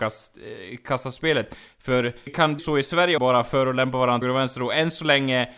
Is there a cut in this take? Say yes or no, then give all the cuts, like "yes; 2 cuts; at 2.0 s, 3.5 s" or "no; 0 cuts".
yes; 4 cuts; at 2.3 s, 2.6 s, 3.2 s, 4.2 s